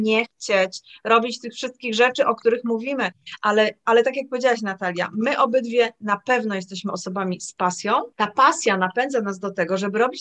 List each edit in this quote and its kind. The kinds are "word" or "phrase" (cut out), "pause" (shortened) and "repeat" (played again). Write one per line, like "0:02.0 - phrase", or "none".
0:08.1 - pause